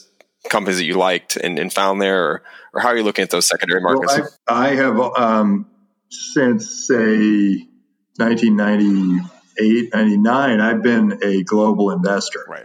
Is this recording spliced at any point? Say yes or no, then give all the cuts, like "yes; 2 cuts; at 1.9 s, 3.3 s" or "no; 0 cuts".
yes; 1 cut; at 4.4 s